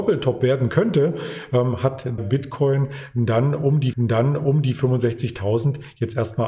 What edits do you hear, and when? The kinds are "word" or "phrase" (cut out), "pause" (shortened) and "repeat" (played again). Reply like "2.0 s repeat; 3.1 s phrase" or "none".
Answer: 2.2 s word; 3.9 s repeat